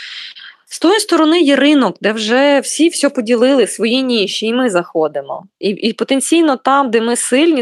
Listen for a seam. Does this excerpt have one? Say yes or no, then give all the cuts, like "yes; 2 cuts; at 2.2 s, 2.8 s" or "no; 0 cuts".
no; 0 cuts